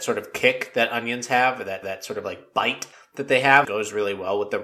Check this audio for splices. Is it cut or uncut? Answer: cut